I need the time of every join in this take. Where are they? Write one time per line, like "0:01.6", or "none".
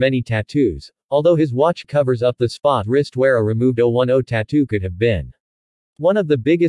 0:01.8
0:02.8

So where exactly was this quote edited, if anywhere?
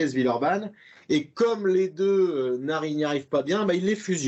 none

